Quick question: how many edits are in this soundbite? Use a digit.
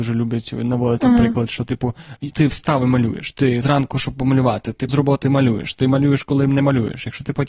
2